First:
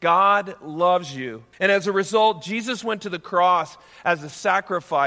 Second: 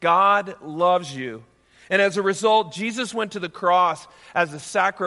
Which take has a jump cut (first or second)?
first